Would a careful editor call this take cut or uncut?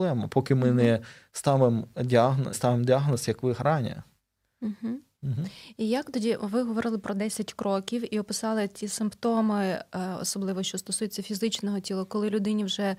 cut